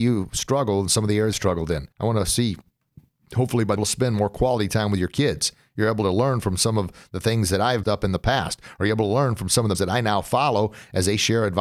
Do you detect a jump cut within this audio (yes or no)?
yes